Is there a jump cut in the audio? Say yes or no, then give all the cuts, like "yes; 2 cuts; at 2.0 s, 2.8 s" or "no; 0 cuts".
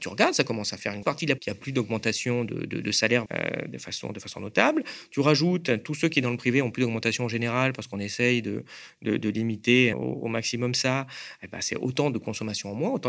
yes; 4 cuts; at 1.0 s, 1.4 s, 3.3 s, 9.9 s